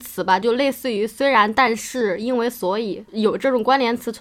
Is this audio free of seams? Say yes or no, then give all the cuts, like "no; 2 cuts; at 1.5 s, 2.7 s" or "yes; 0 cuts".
no; 1 cut; at 3.1 s